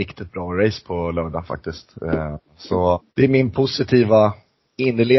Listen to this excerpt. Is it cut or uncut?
cut